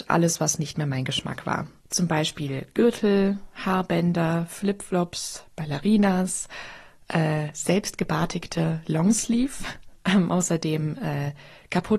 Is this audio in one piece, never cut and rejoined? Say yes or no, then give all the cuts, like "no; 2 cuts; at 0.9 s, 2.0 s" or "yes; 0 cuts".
yes; 0 cuts